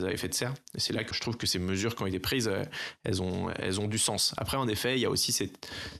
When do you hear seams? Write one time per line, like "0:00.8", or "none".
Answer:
0:01.1